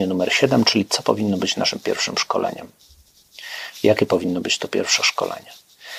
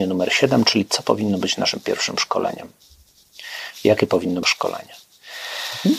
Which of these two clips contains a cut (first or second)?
second